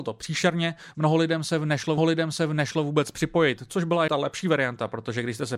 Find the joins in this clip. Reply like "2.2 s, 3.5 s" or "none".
2.0 s, 4.1 s